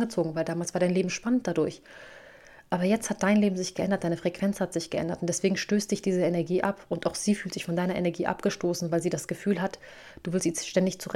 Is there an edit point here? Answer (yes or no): no